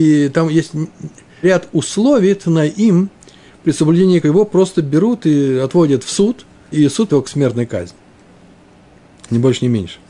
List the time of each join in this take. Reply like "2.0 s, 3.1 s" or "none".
1.4 s, 4.2 s, 6.7 s, 7.1 s